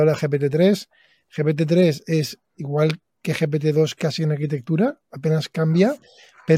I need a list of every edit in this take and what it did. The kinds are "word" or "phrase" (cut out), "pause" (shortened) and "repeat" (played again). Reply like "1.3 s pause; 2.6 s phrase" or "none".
none